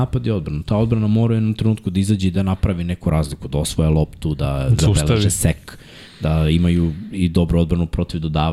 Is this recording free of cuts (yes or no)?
yes